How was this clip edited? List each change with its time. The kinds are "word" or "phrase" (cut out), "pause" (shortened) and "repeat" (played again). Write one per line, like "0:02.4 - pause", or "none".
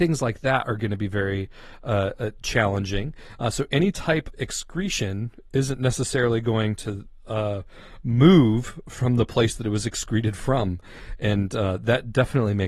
0:04.3 - word